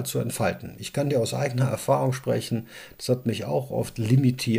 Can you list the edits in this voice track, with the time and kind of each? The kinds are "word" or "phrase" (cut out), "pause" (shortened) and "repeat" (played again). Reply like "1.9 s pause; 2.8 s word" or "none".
none